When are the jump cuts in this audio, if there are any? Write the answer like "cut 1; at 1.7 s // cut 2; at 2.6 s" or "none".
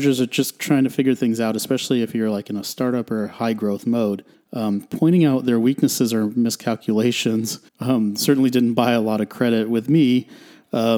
cut 1; at 4.3 s // cut 2; at 7.7 s